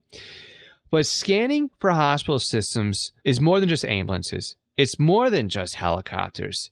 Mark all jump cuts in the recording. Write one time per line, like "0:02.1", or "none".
0:03.2